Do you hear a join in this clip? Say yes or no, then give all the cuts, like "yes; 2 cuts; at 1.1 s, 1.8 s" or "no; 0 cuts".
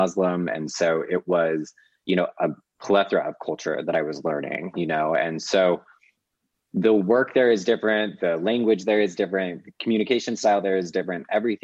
no; 0 cuts